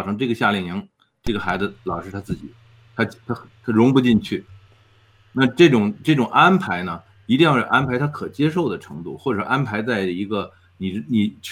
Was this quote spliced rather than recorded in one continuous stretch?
no; 0 cuts

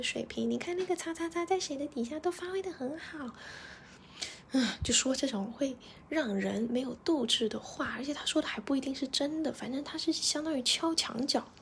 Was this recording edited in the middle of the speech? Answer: no; 0 cuts

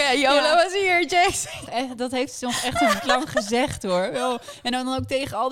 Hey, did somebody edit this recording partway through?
yes; 1 cut; at 3.0 s

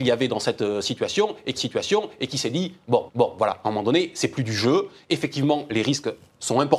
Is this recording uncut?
no; 2 cuts; at 1.6 s, 3.1 s

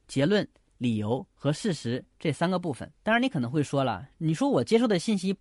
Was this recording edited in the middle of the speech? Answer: yes; 1 cut; at 2.9 s

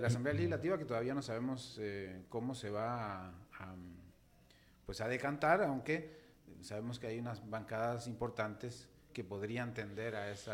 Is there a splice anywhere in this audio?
no; 0 cuts

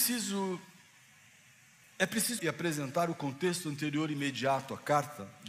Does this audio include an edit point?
yes; 1 cut; at 2.4 s

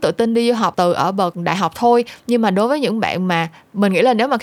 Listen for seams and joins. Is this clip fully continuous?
yes; 0 cuts

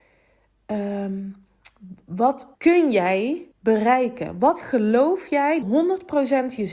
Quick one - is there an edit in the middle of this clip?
yes; 3 cuts; at 2.5 s, 3.5 s, 5.6 s

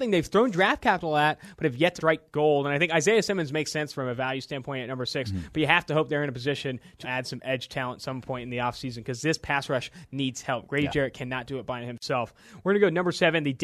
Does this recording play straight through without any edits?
no; 2 cuts; at 2.0 s, 7.0 s

